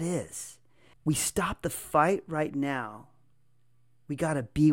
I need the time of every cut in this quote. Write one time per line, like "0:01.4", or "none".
0:00.9